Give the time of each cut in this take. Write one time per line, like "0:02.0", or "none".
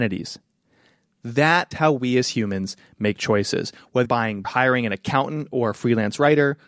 0:01.7
0:04.0
0:04.4